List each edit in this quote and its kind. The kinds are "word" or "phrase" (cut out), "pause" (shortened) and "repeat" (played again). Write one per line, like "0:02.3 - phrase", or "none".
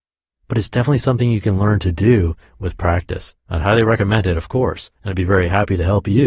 0:03.4 - pause
0:04.9 - pause

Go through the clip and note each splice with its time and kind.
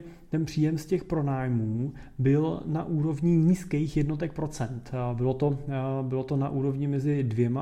none

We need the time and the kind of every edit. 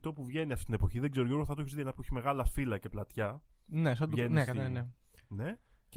none

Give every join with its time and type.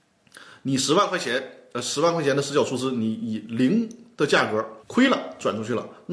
0:04.8 - pause

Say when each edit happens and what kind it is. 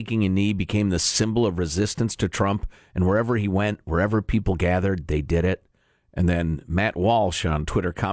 none

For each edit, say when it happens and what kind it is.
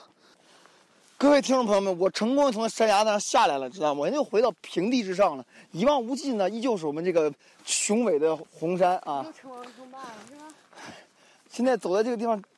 none

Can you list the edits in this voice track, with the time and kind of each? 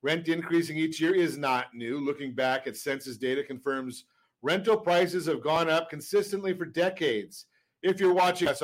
none

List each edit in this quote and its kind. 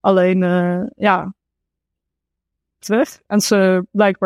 0:02.8 - phrase

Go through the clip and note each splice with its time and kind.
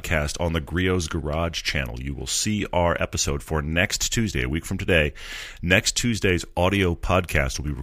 none

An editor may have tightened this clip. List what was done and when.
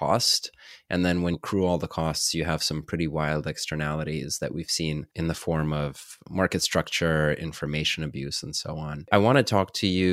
0:01.3 - word

